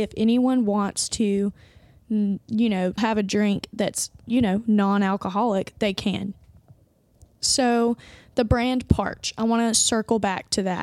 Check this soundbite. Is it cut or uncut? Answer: cut